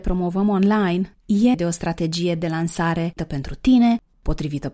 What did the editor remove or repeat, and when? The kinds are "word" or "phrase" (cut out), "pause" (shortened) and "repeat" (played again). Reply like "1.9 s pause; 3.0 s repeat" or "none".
1.5 s word; 3.2 s word